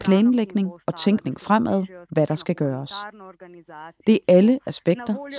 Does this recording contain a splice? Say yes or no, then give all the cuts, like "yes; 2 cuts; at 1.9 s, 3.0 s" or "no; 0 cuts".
no; 0 cuts